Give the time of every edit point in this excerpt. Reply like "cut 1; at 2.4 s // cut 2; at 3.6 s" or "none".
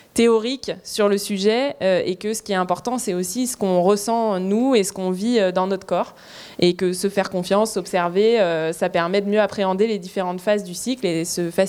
none